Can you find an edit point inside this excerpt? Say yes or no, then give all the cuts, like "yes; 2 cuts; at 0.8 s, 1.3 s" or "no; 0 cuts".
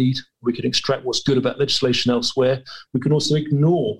no; 0 cuts